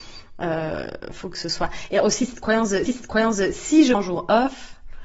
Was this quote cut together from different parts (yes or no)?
yes